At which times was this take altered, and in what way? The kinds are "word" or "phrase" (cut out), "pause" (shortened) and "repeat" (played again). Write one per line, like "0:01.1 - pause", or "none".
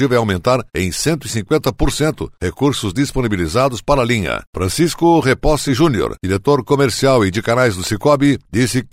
none